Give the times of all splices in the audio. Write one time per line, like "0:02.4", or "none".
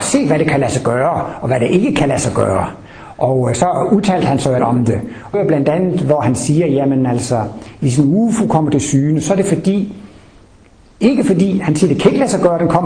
0:04.6
0:05.3